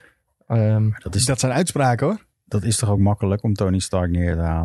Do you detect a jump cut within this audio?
no; 0 cuts

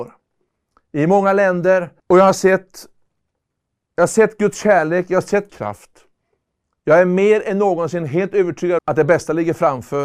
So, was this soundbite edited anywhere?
yes; 3 cuts; at 2.0 s, 5.5 s, 8.8 s

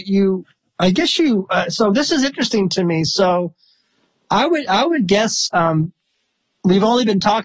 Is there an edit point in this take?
no; 0 cuts

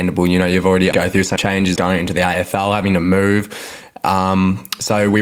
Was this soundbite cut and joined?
yes; 3 cuts; at 0.9 s, 1.4 s, 1.8 s

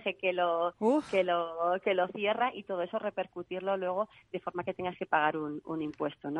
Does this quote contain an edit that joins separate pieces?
no; 0 cuts

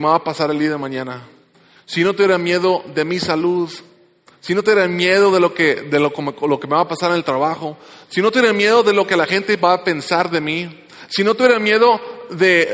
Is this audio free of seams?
yes; 0 cuts

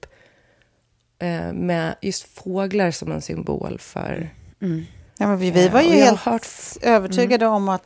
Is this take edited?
yes; 1 cut; at 5.1 s

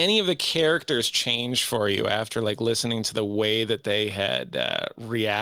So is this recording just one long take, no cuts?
yes; 0 cuts

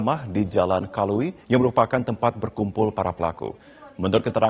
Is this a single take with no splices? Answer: no; 1 cut; at 1.4 s

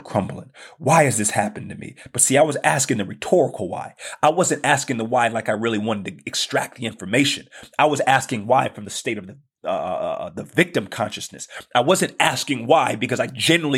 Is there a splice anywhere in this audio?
no; 0 cuts

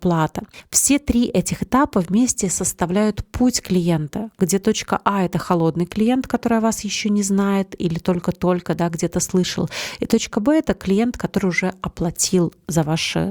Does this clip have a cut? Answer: no; 0 cuts

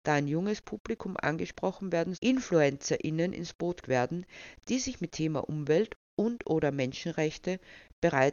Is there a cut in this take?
yes; 3 cuts; at 2.1 s, 3.8 s, 5.1 s

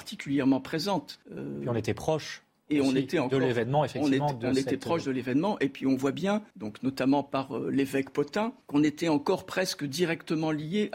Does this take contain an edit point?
yes; 3 cuts; at 1.2 s, 6.5 s, 8.6 s

